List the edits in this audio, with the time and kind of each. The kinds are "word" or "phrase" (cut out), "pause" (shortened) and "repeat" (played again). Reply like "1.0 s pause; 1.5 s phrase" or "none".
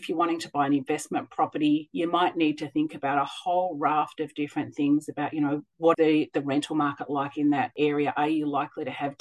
5.9 s word